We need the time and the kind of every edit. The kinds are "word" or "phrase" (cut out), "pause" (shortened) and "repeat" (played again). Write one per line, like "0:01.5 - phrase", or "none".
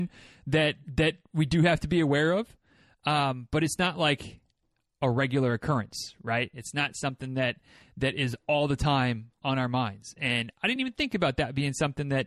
none